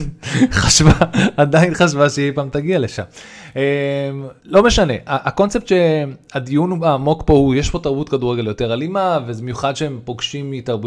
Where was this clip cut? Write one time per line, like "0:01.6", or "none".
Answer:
0:04.4